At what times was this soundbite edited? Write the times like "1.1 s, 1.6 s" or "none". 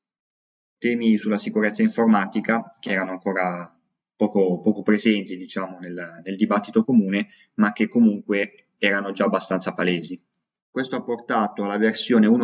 2.8 s